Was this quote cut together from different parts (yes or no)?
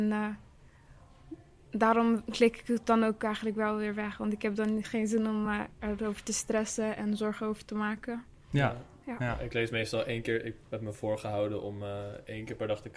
no